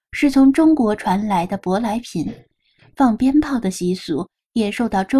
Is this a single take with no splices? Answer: yes; 0 cuts

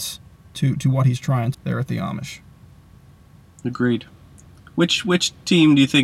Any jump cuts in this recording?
yes; 1 cut; at 1.5 s

